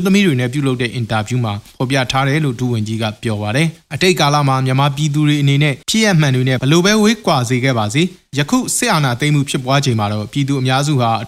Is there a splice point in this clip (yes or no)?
yes